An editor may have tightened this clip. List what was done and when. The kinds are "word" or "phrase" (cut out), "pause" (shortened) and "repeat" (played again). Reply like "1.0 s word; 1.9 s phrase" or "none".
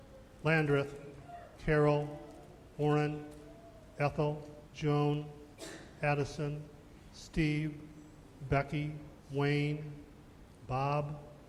1.6 s word; 4.7 s pause; 9.2 s pause